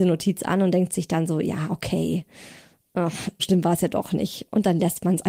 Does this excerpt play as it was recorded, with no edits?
no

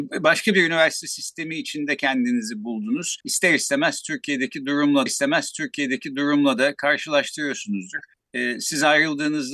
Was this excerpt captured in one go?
no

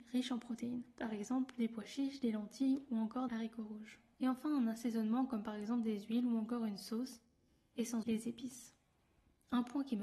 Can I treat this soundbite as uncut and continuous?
no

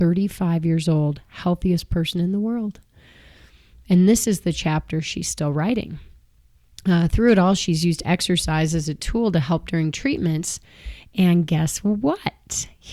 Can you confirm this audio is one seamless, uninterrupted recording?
yes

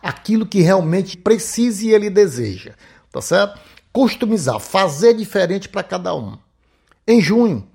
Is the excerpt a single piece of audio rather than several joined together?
no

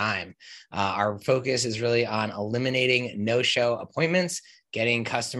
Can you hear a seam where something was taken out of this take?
no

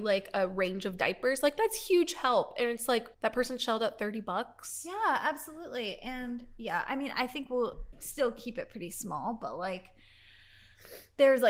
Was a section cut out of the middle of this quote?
yes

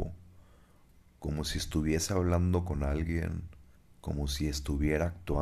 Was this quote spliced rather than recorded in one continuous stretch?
yes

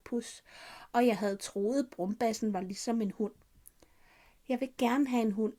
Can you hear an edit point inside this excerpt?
no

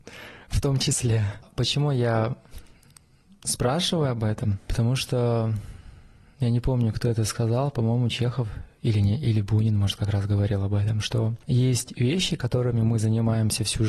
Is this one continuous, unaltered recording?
yes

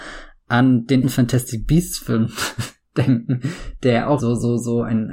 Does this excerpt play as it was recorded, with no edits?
no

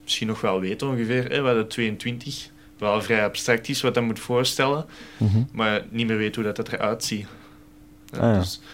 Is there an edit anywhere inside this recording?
no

